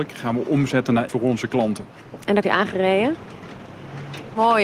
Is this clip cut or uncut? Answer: cut